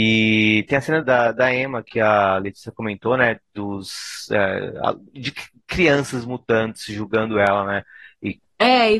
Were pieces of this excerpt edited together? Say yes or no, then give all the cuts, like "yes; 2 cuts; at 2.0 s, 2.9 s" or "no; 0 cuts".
yes; 2 cuts; at 1.0 s, 5.1 s